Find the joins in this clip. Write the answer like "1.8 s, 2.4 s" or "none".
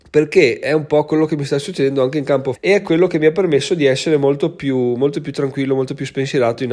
2.5 s